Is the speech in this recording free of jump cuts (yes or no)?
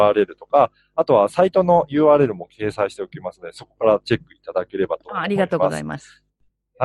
yes